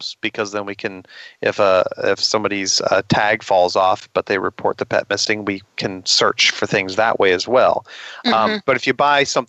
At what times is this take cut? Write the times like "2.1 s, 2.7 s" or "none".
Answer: none

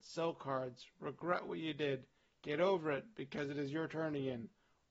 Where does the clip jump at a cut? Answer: none

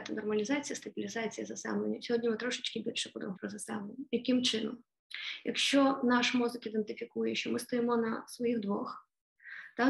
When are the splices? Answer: 3.3 s

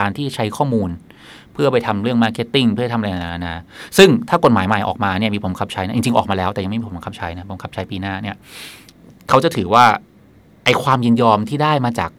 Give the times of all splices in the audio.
none

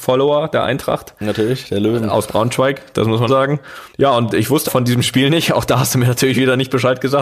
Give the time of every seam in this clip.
3.3 s, 3.9 s, 4.7 s

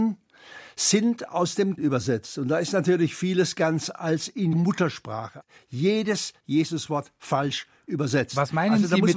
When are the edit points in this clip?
1.8 s, 3.9 s, 4.5 s, 6.4 s

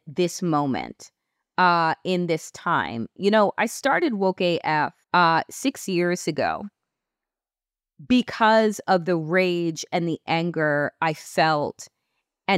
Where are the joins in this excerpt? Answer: 5.0 s

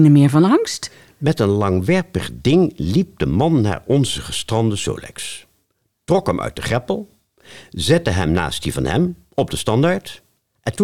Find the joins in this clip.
none

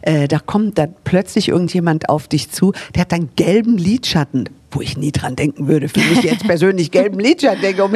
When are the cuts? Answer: none

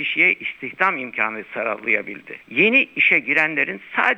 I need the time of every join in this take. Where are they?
2.4 s

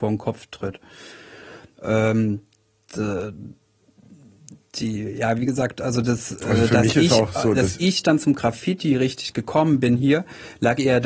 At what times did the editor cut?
none

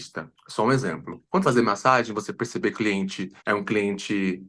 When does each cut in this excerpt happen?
1.4 s, 2.7 s, 3.4 s

